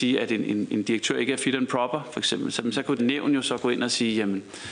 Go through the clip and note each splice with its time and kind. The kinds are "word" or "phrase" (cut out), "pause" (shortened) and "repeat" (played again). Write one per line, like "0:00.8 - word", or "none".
0:03.0 - phrase